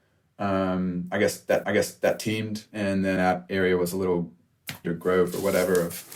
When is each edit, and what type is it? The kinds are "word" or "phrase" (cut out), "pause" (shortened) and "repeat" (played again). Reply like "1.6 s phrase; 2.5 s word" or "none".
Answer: 1.6 s repeat; 3.2 s word; 4.8 s word